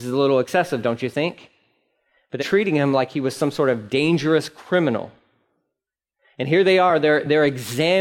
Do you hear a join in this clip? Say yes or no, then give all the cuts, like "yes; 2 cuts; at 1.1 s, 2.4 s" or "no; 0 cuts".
yes; 1 cut; at 2.4 s